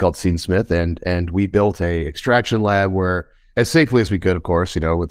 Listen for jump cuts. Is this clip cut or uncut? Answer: uncut